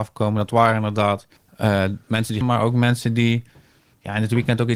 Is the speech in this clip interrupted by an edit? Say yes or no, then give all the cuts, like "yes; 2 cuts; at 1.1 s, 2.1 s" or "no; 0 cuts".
yes; 2 cuts; at 1.4 s, 2.4 s